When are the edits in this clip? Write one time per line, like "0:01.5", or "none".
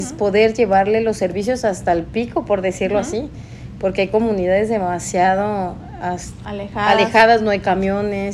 none